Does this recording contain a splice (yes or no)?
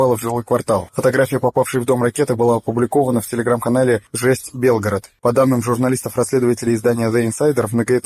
no